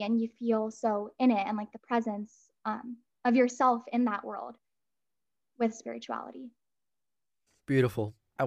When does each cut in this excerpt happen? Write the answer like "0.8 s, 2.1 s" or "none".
none